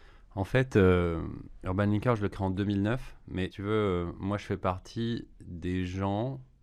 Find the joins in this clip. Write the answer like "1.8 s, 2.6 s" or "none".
3.5 s